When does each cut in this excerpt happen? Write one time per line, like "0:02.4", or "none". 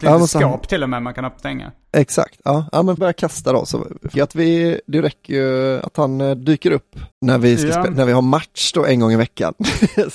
0:01.4
0:03.0
0:04.1
0:07.1